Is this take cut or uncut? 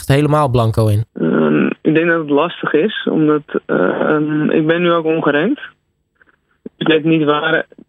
cut